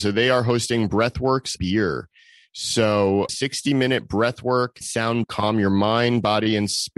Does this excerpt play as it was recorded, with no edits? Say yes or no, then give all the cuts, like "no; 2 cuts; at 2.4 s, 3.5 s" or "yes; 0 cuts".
no; 4 cuts; at 1.6 s, 3.3 s, 4.8 s, 5.2 s